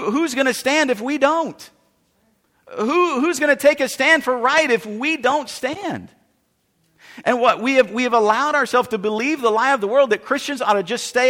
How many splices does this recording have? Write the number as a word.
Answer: zero